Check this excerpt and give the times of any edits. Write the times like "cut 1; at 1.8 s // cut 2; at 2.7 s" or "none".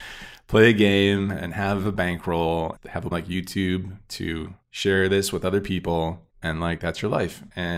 cut 1; at 2.8 s // cut 2; at 3.1 s // cut 3; at 4.6 s // cut 4; at 6.3 s